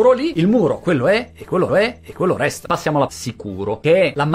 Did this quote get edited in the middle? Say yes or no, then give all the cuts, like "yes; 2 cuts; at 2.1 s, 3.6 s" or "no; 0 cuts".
yes; 2 cuts; at 1.7 s, 3.1 s